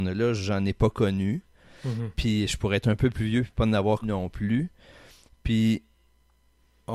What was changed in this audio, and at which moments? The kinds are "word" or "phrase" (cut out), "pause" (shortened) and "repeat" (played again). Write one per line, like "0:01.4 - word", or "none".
0:04.0 - word